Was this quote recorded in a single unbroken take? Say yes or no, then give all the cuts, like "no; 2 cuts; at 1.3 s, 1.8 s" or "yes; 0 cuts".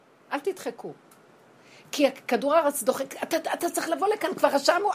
yes; 0 cuts